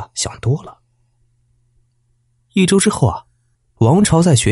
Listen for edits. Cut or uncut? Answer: uncut